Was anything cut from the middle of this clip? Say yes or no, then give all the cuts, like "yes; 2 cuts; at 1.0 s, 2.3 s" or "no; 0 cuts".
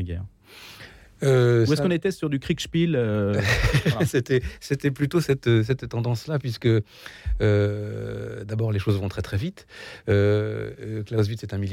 no; 0 cuts